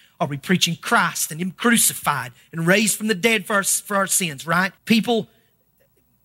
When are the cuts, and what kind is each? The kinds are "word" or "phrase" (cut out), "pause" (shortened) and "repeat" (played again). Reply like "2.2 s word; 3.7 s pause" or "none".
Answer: 4.8 s pause